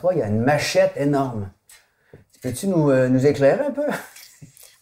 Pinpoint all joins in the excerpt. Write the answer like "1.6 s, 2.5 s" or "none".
none